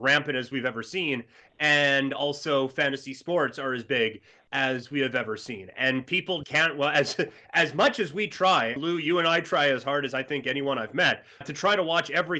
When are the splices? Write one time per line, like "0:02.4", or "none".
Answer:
0:06.4
0:08.8
0:11.4